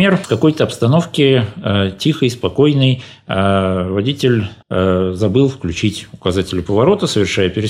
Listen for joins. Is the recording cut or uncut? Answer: cut